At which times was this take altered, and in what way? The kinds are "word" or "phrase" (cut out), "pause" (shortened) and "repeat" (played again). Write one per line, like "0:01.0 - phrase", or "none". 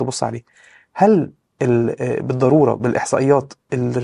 none